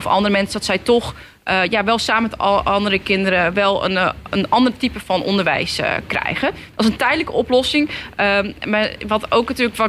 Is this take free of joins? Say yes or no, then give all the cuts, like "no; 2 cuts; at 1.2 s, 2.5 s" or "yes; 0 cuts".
no; 1 cut; at 6.1 s